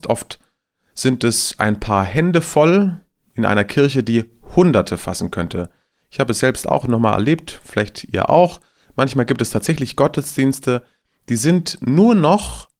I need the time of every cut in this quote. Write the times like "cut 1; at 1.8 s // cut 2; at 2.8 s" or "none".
none

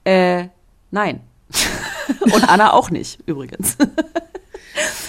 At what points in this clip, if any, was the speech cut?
none

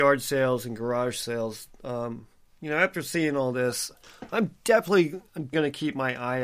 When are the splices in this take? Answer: cut 1; at 5.5 s

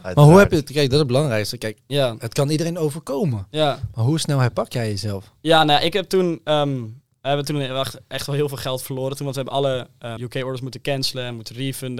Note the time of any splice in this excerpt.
cut 1; at 10.2 s

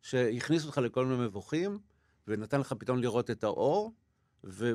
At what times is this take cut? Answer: none

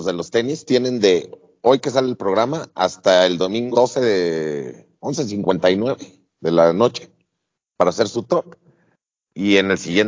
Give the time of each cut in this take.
cut 1; at 3.7 s

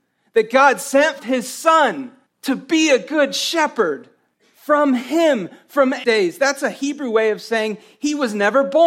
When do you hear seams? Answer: cut 1; at 1.2 s // cut 2; at 2.3 s // cut 3; at 4.3 s // cut 4; at 6.0 s

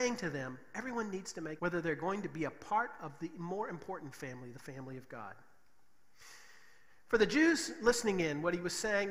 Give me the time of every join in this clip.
cut 1; at 1.6 s

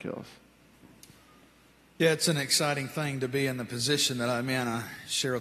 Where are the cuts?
none

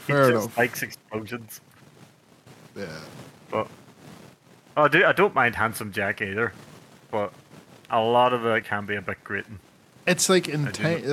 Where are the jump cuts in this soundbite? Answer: cut 1; at 8.6 s

